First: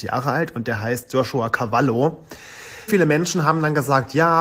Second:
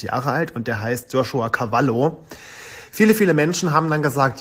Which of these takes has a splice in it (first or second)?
first